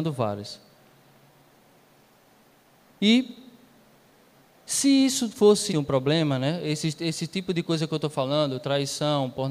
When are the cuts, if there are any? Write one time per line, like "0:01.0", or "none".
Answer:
0:04.3
0:05.7